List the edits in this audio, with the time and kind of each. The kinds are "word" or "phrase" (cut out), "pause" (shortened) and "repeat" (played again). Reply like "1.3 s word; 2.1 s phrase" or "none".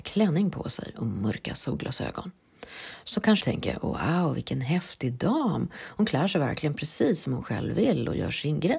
3.4 s word